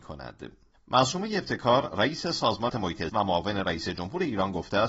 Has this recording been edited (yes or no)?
yes